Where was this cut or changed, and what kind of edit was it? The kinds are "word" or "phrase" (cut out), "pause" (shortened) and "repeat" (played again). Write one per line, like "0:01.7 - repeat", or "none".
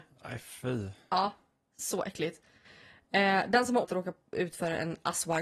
0:03.8 - word